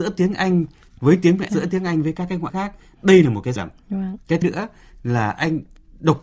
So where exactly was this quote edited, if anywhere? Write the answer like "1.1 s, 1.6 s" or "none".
1.5 s, 2.5 s, 3.6 s, 4.4 s